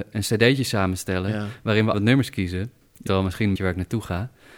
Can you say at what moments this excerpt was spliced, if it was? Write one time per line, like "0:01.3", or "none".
0:01.9
0:03.1
0:03.6